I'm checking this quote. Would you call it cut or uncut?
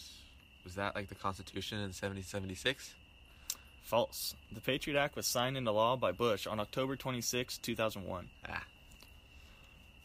uncut